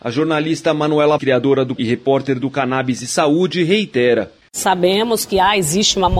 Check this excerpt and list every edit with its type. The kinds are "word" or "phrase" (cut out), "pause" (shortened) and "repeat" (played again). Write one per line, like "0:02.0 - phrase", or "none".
0:01.2 - word
0:01.8 - phrase